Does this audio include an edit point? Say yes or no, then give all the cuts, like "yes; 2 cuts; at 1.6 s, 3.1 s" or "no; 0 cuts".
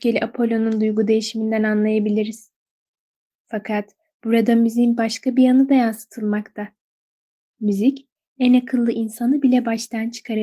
no; 0 cuts